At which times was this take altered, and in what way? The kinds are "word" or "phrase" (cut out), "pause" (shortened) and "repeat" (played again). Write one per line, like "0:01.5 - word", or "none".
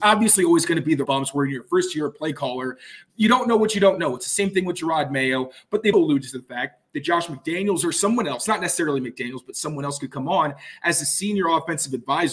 0:01.0 - word
0:05.9 - word